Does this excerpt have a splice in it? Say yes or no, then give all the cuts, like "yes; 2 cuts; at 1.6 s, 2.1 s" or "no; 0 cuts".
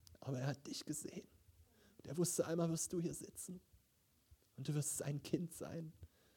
no; 0 cuts